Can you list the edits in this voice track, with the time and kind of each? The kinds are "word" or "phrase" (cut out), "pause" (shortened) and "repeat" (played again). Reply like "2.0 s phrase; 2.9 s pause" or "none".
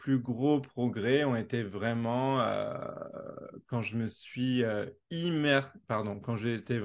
5.8 s word